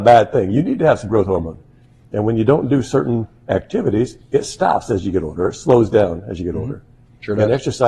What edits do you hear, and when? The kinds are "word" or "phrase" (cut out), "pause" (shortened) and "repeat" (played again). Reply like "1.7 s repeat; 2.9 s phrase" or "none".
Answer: 4.2 s pause

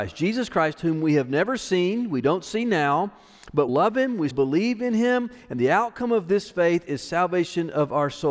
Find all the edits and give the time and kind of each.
3.7 s phrase; 4.3 s word

